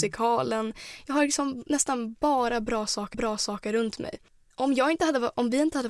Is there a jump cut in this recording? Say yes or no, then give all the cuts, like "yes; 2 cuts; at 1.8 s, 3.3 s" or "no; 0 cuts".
yes; 1 cut; at 3.1 s